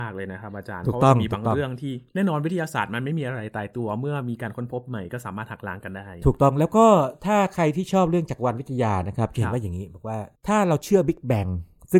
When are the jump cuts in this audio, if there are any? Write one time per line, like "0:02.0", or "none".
0:02.1
0:10.4